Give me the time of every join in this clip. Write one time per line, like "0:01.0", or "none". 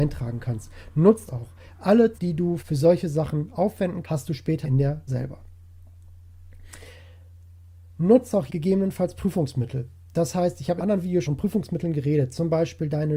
0:01.3
0:02.1
0:02.6
0:04.0
0:04.6
0:05.1
0:08.5
0:10.8
0:11.2